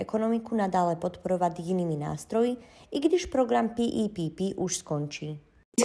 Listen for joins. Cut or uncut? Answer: uncut